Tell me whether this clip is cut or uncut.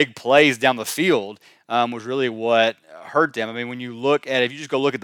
uncut